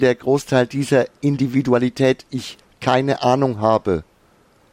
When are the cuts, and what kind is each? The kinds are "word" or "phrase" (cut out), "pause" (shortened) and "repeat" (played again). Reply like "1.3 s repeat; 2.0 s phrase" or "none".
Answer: 2.3 s phrase

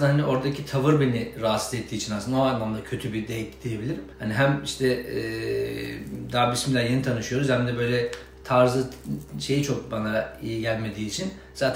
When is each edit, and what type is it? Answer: 4.1 s pause

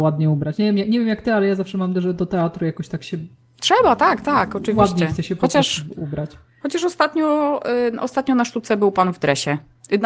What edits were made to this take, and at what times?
none

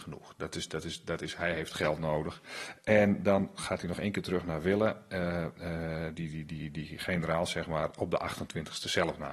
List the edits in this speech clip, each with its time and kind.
6.1 s word

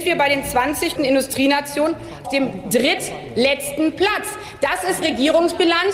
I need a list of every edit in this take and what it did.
1.0 s word; 2.2 s word; 5.0 s word

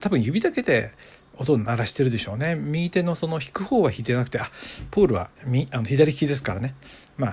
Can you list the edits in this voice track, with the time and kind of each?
5.4 s pause

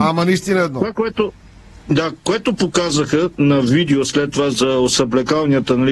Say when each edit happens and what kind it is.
none

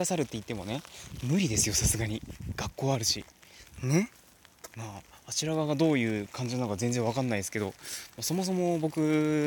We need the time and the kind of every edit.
4.7 s pause

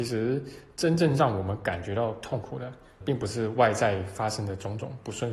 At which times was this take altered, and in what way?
3.0 s word

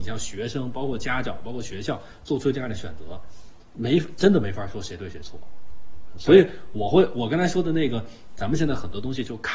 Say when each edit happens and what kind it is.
3.6 s pause

